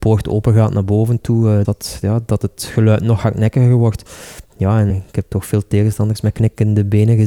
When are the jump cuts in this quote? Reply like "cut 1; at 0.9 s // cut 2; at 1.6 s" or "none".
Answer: cut 1; at 1.6 s // cut 2; at 4.9 s